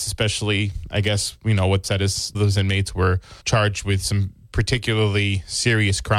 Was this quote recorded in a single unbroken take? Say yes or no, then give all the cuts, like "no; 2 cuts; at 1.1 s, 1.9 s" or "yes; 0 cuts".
no; 3 cuts; at 1.8 s, 2.3 s, 3.4 s